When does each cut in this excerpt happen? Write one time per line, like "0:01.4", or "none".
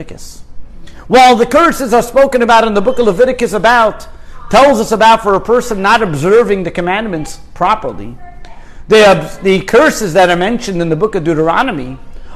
none

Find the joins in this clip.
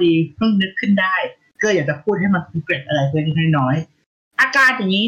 none

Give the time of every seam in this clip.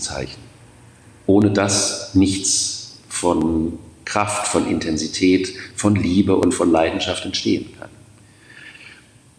none

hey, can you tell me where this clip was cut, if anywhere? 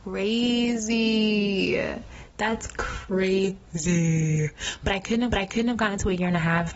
0:05.3

